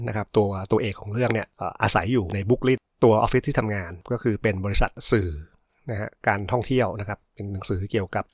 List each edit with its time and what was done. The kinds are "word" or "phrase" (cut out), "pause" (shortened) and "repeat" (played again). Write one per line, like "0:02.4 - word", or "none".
none